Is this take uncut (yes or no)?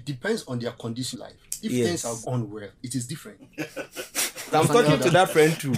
no